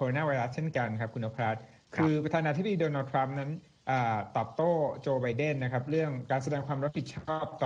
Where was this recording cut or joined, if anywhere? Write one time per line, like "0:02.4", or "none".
none